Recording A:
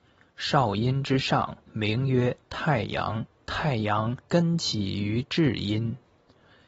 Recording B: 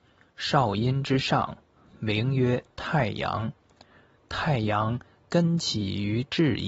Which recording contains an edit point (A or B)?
A